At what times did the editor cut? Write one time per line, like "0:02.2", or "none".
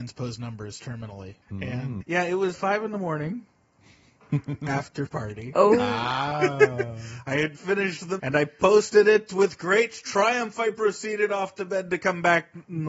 0:01.4
0:02.0
0:02.5
0:05.1
0:07.6
0:08.2